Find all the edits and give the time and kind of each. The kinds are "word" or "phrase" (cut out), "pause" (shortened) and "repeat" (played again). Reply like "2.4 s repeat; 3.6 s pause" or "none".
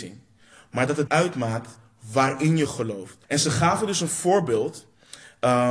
1.1 s word; 3.2 s pause